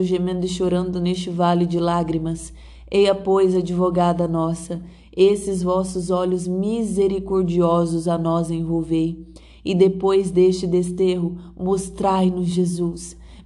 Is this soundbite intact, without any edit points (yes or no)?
yes